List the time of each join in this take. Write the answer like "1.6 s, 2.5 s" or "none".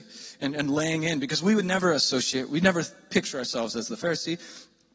none